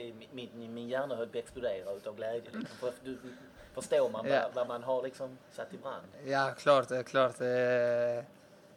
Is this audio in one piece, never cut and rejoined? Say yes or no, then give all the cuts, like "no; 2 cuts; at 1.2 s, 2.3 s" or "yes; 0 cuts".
no; 1 cut; at 5.4 s